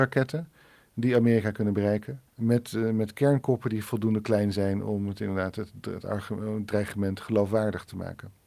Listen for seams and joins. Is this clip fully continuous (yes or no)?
no